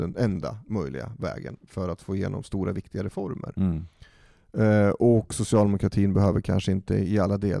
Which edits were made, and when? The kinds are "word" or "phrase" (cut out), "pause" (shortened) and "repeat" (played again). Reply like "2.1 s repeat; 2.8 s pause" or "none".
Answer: none